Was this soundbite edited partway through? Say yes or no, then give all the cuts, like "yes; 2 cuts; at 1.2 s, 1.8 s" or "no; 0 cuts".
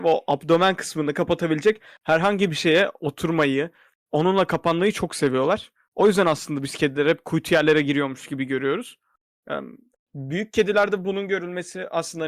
no; 0 cuts